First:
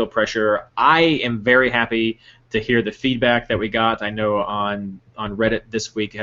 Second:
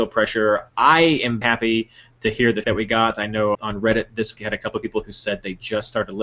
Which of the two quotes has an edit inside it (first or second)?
second